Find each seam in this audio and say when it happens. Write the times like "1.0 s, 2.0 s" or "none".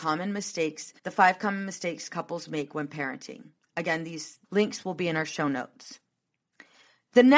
1.0 s, 4.4 s